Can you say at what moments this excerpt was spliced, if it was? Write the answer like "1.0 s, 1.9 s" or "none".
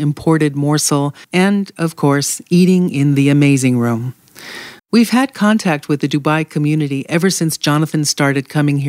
1.2 s, 4.8 s

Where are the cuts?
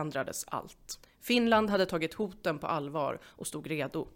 1.0 s

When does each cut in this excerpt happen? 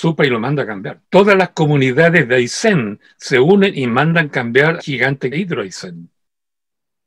1.0 s, 4.8 s, 5.3 s

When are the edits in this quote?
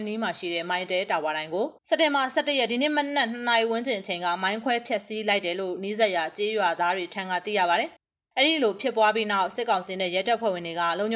1.8 s, 8.0 s

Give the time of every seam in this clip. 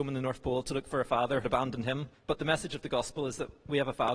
1.4 s, 2.1 s

